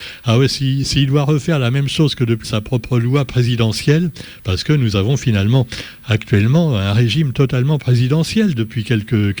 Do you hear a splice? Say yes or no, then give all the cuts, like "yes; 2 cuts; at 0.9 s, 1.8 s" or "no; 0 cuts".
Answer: yes; 1 cut; at 2.4 s